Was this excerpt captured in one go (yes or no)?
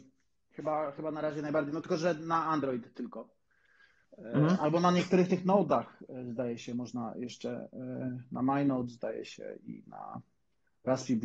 yes